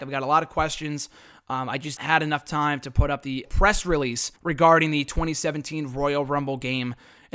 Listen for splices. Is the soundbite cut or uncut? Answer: cut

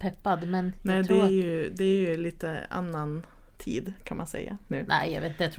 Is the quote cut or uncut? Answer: uncut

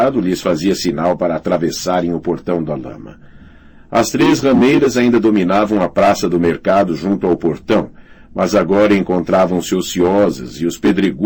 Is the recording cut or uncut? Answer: uncut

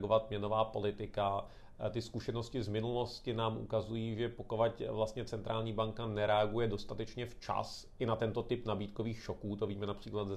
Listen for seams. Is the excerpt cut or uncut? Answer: uncut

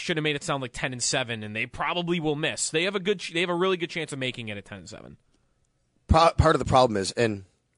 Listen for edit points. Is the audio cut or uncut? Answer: cut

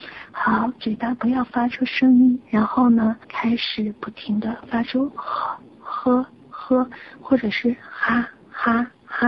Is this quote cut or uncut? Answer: cut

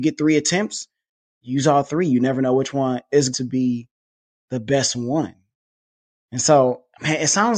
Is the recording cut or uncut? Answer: cut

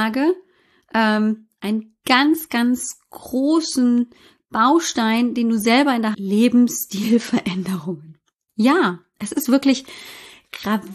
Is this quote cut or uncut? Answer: cut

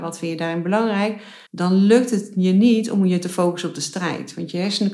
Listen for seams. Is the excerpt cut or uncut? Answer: cut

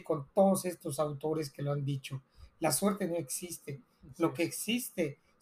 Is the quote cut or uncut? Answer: uncut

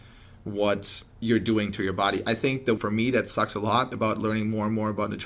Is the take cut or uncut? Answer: cut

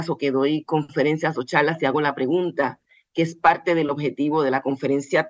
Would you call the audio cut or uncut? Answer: uncut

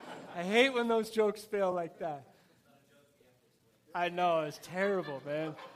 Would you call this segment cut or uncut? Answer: uncut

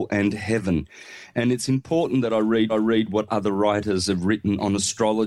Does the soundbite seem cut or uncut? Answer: cut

